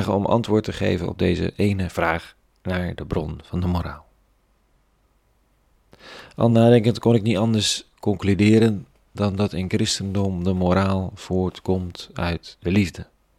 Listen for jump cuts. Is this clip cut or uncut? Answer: uncut